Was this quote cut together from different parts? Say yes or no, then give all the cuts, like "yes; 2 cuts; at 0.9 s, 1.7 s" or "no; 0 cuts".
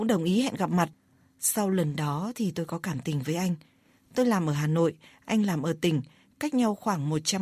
no; 0 cuts